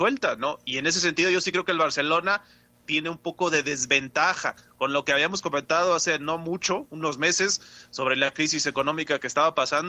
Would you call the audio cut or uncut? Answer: uncut